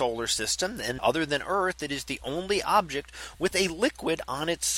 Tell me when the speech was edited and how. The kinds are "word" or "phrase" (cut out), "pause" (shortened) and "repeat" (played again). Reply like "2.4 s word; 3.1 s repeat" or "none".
1.0 s word